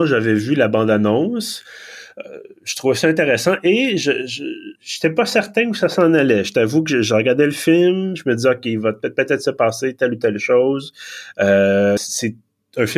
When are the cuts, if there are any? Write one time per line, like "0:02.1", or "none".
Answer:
0:04.7
0:12.0